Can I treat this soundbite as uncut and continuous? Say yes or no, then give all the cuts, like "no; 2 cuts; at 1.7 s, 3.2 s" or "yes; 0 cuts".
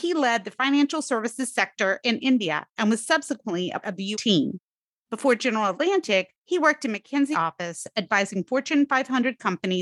no; 4 cuts; at 3.8 s, 4.1 s, 6.4 s, 7.3 s